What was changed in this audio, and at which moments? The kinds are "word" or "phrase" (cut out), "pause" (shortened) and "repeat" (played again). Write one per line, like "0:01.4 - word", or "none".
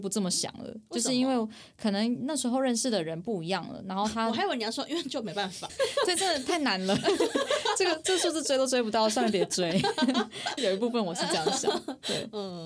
0:05.7 - word
0:10.6 - word